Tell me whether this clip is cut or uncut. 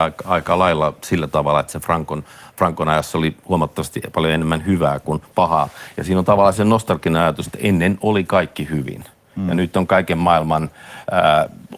uncut